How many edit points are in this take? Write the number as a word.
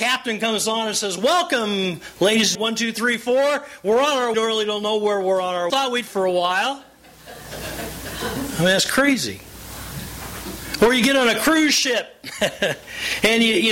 four